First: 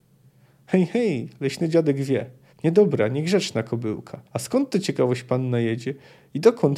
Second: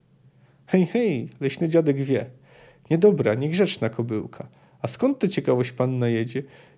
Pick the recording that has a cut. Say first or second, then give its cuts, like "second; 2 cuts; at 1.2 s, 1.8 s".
first; 2 cuts; at 2.5 s, 4.3 s